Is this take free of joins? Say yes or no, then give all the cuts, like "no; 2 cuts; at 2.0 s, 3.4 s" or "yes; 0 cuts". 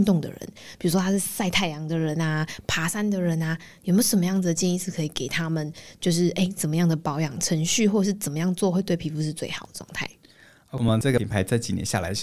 yes; 0 cuts